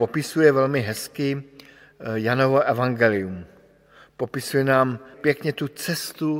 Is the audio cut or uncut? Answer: cut